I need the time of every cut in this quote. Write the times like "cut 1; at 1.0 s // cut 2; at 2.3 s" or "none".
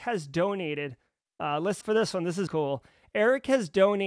cut 1; at 1.8 s // cut 2; at 2.5 s